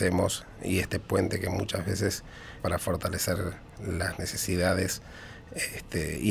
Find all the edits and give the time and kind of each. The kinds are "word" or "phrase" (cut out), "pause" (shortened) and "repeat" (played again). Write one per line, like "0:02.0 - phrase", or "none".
0:02.6 - word